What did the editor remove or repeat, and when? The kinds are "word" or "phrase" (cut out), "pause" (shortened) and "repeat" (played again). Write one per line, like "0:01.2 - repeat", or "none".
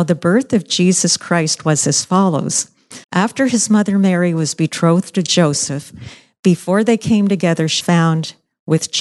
0:03.0 - pause
0:07.8 - word